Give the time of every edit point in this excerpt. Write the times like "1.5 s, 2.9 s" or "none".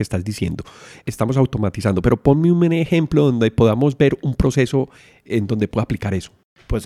none